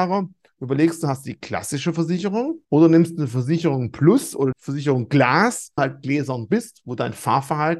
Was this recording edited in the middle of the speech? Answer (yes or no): yes